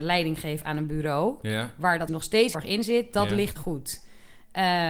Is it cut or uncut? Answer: cut